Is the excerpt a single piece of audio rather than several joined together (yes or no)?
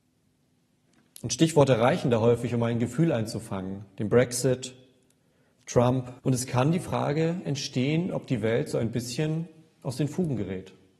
no